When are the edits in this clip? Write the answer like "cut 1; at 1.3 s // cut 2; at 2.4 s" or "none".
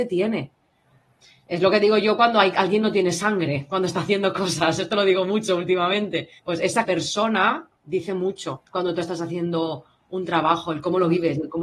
cut 1; at 6.4 s // cut 2; at 6.8 s // cut 3; at 8.7 s